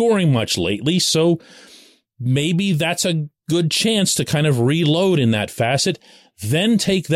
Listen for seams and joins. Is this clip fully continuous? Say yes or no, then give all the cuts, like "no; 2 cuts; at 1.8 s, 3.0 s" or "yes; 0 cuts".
yes; 0 cuts